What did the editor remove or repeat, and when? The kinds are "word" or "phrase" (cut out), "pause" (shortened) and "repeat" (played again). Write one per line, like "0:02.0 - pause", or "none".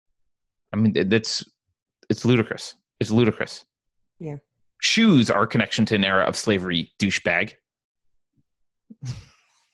none